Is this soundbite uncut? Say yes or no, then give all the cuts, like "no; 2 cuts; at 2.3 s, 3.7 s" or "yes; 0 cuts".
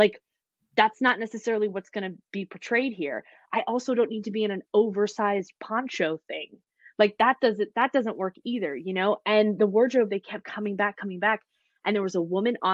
yes; 0 cuts